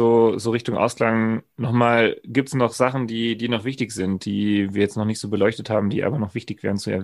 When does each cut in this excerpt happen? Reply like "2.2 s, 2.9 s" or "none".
none